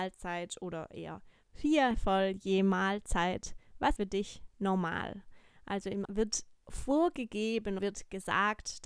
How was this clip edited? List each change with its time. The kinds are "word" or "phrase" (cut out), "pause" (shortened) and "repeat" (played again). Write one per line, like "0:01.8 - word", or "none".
0:01.9 - word
0:04.0 - word
0:06.0 - word
0:07.8 - word

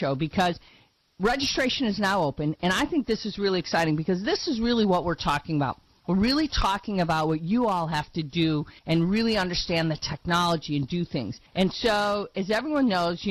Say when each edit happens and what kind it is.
0:08.8 - pause
0:11.5 - pause

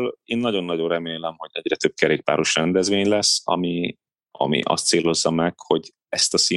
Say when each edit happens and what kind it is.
none

